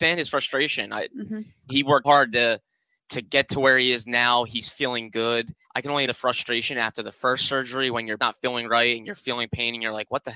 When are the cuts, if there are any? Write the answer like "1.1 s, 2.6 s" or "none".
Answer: 1.7 s, 2.0 s, 3.0 s, 4.7 s, 5.6 s, 6.1 s, 8.2 s

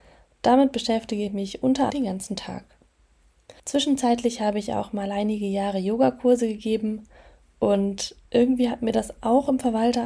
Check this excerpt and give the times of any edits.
1.9 s, 3.6 s, 8.2 s

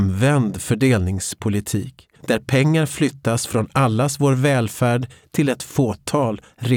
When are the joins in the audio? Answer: 2.2 s

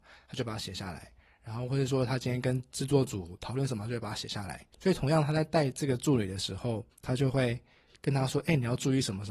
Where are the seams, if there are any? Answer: 4.7 s, 6.9 s

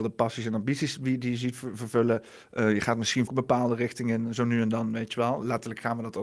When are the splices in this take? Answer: 3.3 s

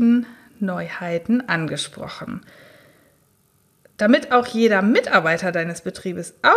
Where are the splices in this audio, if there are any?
none

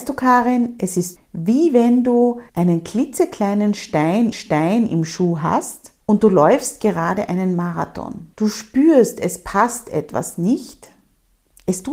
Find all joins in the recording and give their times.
1.2 s, 2.5 s, 4.3 s, 6.0 s, 8.3 s

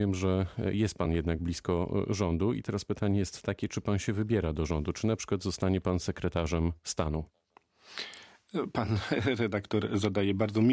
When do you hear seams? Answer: none

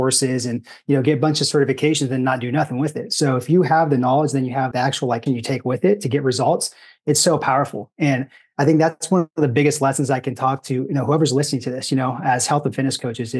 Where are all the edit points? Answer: 4.7 s, 5.3 s

